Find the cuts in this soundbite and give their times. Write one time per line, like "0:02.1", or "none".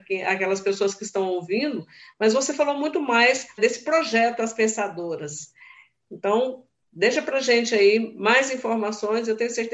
0:03.6